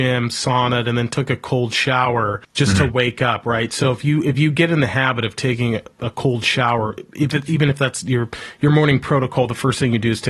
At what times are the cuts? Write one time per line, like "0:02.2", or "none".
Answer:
0:02.4